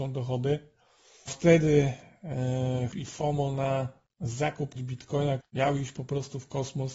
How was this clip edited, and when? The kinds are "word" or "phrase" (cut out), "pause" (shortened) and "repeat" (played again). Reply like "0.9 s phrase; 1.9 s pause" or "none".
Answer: 1.3 s word; 2.9 s word; 4.8 s word; 5.4 s word